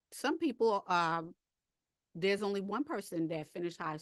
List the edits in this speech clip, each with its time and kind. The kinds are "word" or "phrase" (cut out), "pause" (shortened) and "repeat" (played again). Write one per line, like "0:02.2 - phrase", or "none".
none